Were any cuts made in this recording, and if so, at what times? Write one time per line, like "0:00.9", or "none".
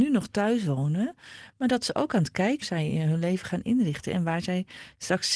0:02.6